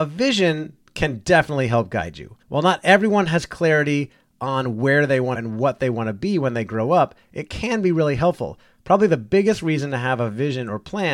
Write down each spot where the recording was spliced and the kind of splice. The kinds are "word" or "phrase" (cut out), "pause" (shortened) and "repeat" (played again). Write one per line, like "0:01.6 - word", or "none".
0:02.4 - pause
0:05.3 - phrase